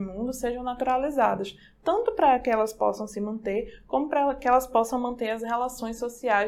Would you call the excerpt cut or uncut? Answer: uncut